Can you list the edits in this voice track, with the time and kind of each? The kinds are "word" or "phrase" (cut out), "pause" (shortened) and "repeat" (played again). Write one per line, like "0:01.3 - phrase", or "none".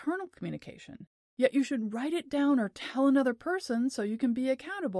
none